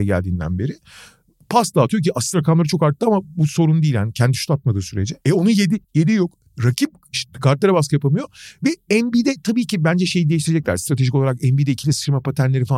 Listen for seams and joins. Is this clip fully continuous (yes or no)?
no